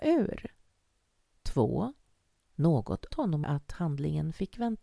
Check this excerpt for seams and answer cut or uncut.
cut